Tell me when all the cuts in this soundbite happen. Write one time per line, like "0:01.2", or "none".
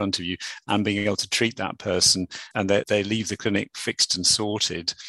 0:02.5
0:02.8